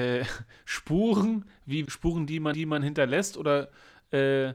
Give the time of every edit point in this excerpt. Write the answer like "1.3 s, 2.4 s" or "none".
1.9 s, 2.5 s